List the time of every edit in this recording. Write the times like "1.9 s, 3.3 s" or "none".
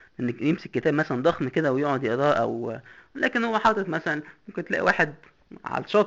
none